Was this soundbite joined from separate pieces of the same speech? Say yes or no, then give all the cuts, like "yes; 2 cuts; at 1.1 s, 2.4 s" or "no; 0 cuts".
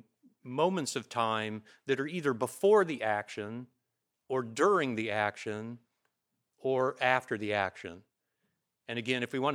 no; 0 cuts